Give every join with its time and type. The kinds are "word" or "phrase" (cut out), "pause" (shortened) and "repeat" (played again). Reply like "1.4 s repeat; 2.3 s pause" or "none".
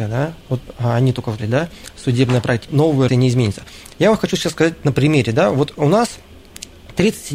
1.4 s word; 2.7 s word; 3.1 s phrase